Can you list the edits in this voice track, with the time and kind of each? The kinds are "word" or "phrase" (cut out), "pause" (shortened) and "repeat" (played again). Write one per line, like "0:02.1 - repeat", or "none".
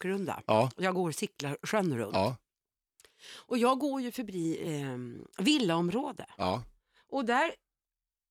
none